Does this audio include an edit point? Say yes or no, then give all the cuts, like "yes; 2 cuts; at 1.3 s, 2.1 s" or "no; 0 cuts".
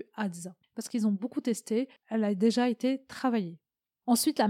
no; 0 cuts